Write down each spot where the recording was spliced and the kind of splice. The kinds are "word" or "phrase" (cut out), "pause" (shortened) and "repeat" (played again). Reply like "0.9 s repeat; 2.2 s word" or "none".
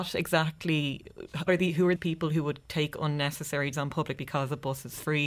1.5 s word; 2.0 s word; 3.7 s word; 4.2 s word

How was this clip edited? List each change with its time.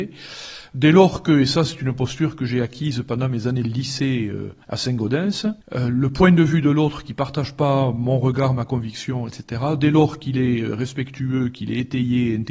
4.6 s pause; 5.6 s pause

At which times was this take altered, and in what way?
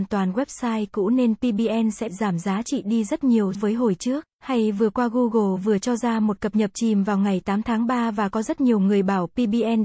2.1 s word; 3.5 s word; 4.3 s pause

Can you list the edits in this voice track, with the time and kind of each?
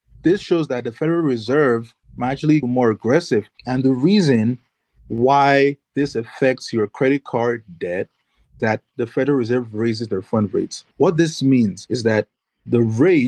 2.0 s pause; 2.6 s phrase; 3.6 s pause; 5.8 s pause; 8.6 s word; 8.9 s word; 10.9 s pause; 11.9 s word

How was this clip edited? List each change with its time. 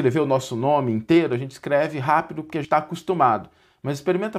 2.6 s word

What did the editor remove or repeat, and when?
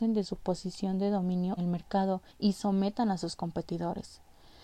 1.6 s word; 2.3 s pause

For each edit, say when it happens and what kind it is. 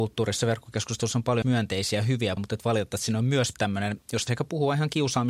1.4 s word; 2.4 s word; 3.5 s word; 4.3 s word

